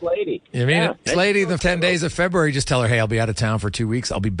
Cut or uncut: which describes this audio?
cut